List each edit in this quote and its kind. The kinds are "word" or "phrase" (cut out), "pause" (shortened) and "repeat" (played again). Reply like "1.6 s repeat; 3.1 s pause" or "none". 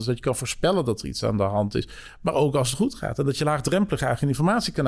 none

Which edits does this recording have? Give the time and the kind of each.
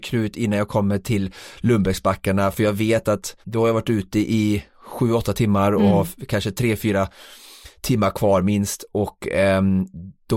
3.4 s pause

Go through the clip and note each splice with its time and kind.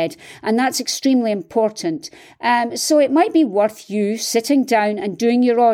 none

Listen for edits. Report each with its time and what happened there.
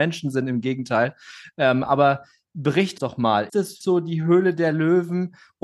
3.0 s word; 3.5 s word; 3.8 s word

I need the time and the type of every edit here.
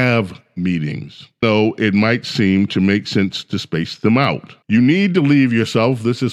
1.4 s word; 4.6 s pause

